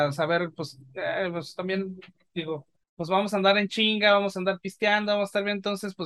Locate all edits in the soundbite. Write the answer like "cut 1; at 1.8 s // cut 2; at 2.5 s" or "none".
cut 1; at 2.8 s